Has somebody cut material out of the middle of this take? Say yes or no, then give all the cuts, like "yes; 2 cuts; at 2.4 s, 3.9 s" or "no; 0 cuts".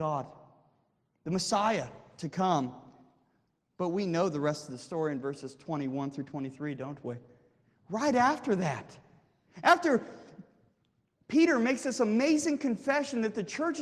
no; 0 cuts